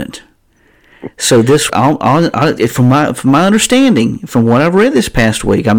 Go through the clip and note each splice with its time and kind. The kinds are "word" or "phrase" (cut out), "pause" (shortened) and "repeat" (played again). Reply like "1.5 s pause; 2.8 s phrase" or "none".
1.7 s word